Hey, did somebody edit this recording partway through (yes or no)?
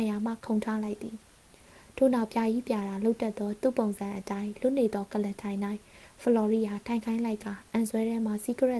no